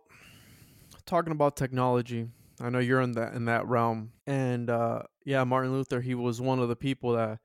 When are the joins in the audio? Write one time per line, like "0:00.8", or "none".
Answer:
0:04.2